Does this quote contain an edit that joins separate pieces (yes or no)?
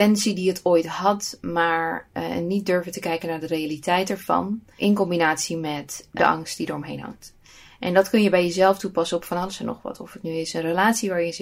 no